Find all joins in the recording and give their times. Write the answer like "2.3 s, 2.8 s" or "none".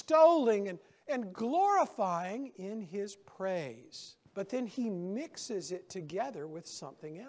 4.3 s